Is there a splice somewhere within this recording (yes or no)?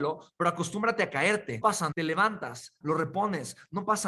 yes